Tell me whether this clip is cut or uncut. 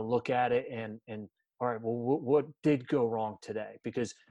uncut